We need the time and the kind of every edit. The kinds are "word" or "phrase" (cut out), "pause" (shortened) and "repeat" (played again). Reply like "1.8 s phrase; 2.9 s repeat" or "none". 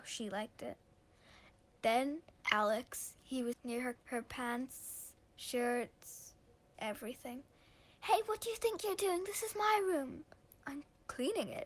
2.4 s phrase; 3.5 s word; 4.0 s phrase; 6.7 s word